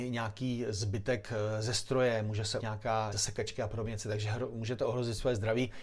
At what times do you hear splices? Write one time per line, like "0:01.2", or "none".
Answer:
0:02.6
0:03.1